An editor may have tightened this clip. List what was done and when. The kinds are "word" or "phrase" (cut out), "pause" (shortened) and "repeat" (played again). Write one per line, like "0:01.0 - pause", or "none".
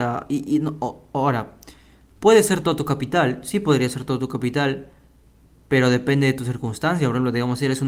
none